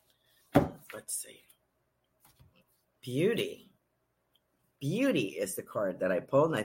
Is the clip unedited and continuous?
yes; 0 cuts

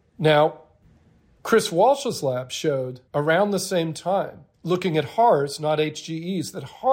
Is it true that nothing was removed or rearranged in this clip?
no; 2 cuts; at 3.1 s, 4.5 s

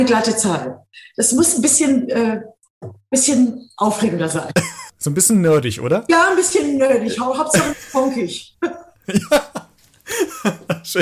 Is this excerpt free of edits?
yes; 0 cuts

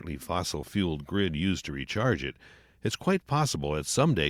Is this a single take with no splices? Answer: yes; 0 cuts

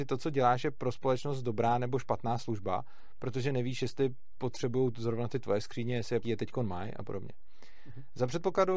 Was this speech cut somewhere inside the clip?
yes; 1 cut; at 6.2 s

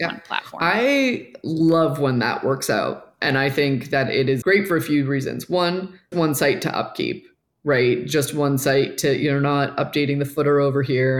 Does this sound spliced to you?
yes; 2 cuts; at 4.4 s, 6.1 s

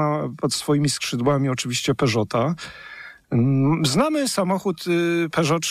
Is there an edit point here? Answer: no; 0 cuts

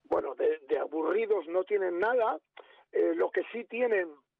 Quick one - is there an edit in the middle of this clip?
no; 0 cuts

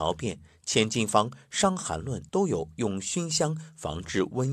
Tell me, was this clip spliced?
yes; 1 cut; at 2.3 s

